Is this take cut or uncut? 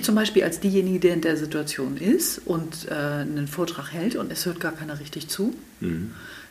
cut